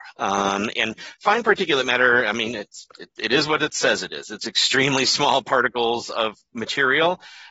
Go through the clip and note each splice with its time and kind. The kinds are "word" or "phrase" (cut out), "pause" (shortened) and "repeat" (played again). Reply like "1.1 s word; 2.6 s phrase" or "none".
none